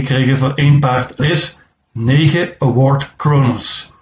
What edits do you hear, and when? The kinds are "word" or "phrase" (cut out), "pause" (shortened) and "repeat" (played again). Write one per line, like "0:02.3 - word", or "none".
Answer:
0:01.2 - word
0:01.7 - pause